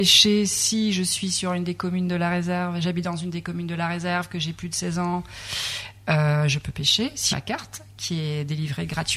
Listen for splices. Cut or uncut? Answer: cut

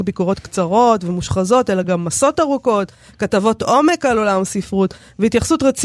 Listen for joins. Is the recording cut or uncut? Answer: uncut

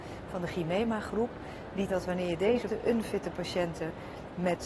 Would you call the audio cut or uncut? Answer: cut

